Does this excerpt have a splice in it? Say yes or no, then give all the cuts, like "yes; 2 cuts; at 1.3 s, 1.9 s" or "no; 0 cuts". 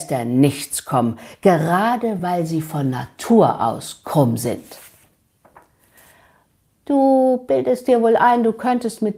no; 0 cuts